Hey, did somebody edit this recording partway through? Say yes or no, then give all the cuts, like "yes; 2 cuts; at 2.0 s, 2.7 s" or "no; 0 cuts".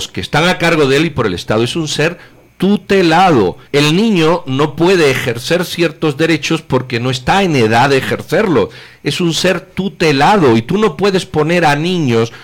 yes; 1 cut; at 3.7 s